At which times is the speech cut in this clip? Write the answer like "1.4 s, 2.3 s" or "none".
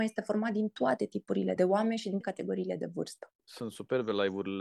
1.6 s, 2.2 s, 3.4 s